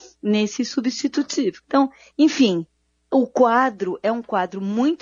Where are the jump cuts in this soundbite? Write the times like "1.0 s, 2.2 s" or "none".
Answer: 1.6 s